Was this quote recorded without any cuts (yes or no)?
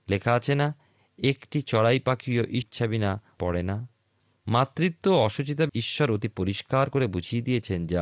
no